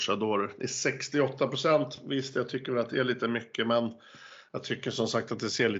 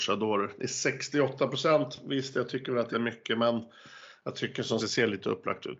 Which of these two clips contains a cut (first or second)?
second